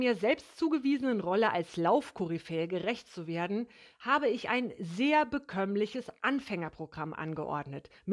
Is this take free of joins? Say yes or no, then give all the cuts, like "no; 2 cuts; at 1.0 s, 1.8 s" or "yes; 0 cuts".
yes; 0 cuts